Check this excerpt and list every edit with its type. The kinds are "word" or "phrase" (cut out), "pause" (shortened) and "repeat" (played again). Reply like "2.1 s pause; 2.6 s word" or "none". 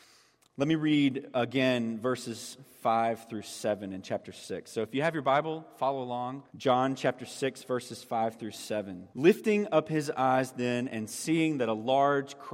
6.5 s pause; 9.1 s pause